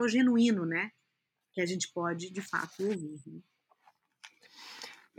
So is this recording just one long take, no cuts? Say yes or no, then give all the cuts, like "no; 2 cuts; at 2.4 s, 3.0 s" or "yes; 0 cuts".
yes; 0 cuts